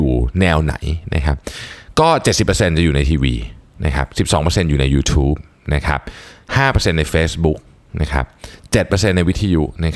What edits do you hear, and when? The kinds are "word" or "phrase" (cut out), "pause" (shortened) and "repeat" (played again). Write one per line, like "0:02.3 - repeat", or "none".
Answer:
none